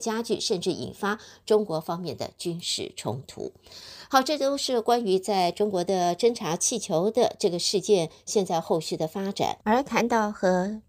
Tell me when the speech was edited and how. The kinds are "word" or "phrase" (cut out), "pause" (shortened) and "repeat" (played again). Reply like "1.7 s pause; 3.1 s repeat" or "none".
9.6 s pause